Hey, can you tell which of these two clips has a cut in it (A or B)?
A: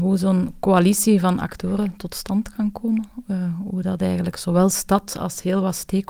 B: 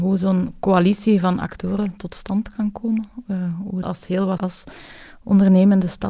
B